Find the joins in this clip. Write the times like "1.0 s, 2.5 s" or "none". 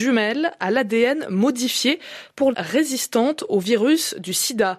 2.5 s